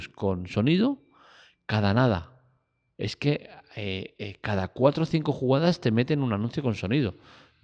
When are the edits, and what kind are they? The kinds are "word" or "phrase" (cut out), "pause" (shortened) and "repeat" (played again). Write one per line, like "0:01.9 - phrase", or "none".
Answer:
none